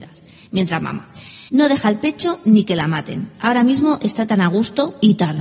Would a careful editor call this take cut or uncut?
cut